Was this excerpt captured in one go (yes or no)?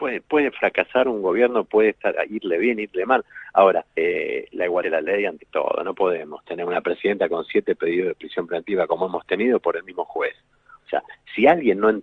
no